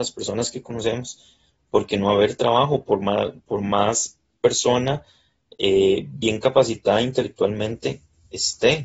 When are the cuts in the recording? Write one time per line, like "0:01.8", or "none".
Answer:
none

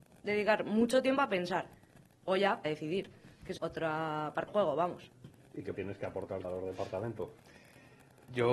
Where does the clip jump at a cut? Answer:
0:02.3
0:02.6
0:03.6
0:04.5
0:05.7
0:06.4

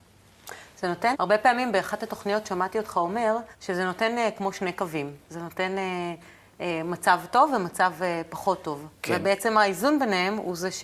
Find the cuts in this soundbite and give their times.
0:01.1
0:03.5
0:05.2

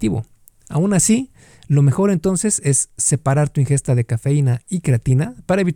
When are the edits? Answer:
none

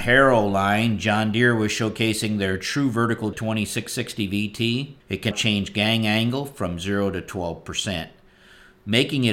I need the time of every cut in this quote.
0:03.3
0:05.0
0:05.3

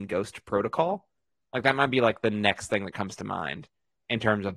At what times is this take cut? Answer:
none

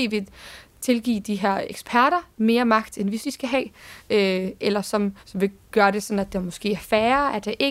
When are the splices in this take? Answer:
0:03.2
0:05.2

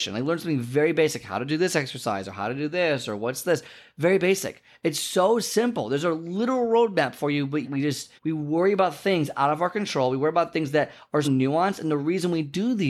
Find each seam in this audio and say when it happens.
0:07.6
0:08.2
0:11.2

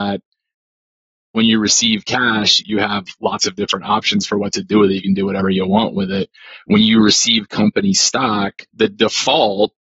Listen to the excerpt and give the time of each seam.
0:02.6
0:08.7

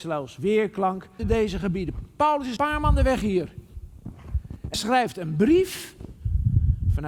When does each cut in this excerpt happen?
0:01.2
0:02.6
0:04.7

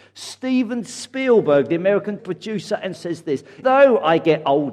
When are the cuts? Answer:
0:02.2
0:03.0
0:03.6

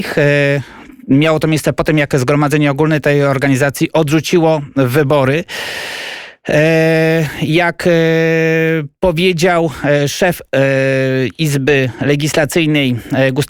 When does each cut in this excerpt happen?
none

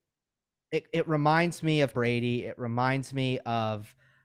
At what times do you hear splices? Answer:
0:01.9

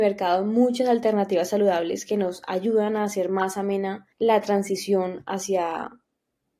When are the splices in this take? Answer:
0:04.1

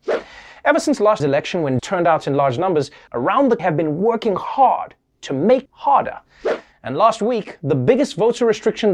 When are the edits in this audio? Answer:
0:01.2
0:01.8
0:03.1
0:03.6
0:05.7

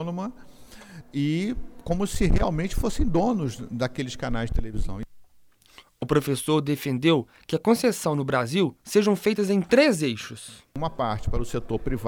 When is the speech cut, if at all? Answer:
0:10.7

